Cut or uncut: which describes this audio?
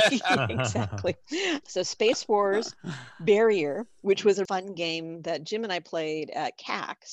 cut